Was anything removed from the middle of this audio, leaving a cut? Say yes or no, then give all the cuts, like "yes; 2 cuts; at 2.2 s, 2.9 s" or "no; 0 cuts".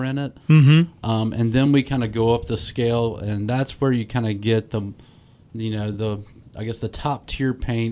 no; 0 cuts